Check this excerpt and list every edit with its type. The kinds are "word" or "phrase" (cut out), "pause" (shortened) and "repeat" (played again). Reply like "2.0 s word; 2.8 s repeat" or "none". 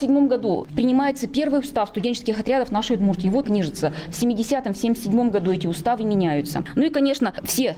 3.4 s phrase